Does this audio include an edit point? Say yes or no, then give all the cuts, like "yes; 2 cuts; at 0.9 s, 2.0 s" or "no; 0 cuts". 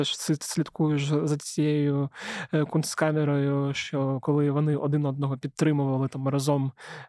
no; 0 cuts